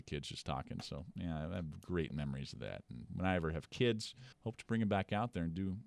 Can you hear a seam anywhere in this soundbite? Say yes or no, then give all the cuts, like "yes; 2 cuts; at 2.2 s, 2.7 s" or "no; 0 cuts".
yes; 2 cuts; at 3.1 s, 4.3 s